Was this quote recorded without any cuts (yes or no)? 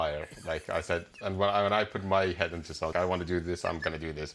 no